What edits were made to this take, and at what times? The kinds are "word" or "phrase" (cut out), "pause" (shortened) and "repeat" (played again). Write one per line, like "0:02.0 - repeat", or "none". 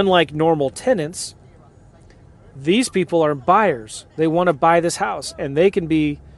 0:04.1 - pause